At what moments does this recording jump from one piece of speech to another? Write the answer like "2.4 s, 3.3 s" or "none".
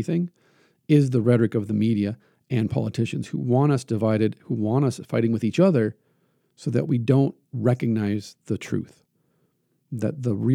7.4 s